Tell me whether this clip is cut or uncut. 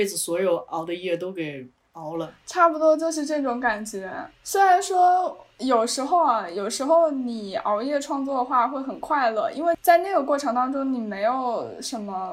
cut